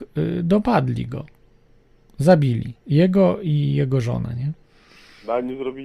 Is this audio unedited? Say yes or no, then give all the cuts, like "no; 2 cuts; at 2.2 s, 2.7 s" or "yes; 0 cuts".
no; 1 cut; at 2.8 s